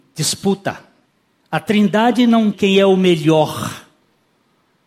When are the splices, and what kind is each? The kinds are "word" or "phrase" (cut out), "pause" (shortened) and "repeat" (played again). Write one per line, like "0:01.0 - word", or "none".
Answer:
0:01.1 - pause
0:02.5 - word